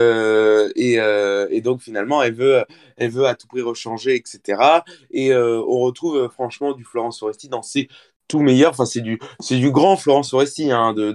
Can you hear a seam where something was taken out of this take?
no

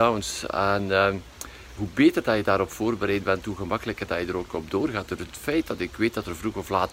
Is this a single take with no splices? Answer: no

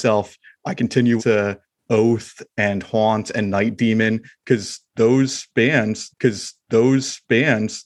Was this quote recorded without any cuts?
no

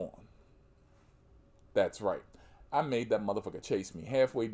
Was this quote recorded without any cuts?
yes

